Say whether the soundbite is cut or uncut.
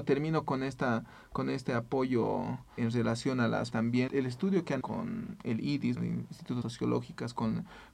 cut